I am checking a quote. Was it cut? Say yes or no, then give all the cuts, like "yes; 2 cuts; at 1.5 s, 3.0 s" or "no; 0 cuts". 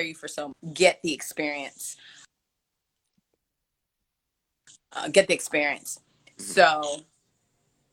no; 0 cuts